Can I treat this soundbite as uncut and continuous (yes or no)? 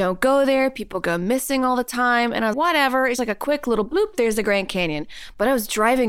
no